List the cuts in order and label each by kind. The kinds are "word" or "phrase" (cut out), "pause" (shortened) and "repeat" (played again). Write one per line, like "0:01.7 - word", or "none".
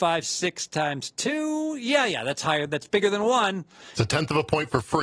none